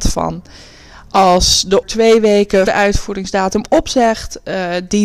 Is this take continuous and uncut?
no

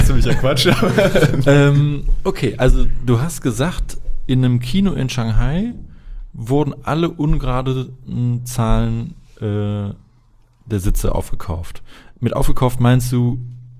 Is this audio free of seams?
yes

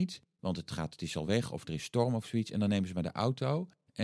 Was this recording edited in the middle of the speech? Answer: no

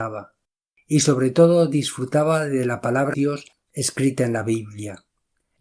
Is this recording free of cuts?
no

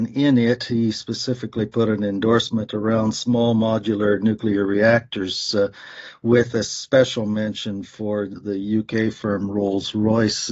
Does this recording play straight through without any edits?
yes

